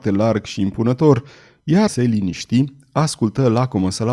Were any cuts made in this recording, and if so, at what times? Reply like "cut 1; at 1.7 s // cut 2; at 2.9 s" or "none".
cut 1; at 1.9 s